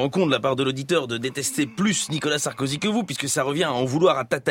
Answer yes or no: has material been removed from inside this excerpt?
no